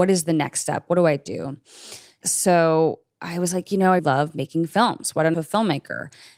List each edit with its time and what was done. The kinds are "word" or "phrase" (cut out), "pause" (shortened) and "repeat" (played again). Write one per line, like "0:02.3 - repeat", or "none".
0:04.0 - word
0:05.3 - phrase